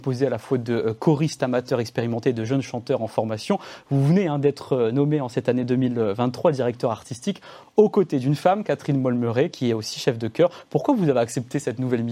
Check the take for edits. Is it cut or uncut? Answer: uncut